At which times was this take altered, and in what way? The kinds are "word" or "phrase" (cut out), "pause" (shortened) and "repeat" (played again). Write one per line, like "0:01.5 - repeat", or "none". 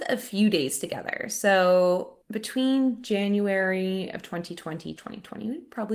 0:02.2 - pause
0:05.0 - phrase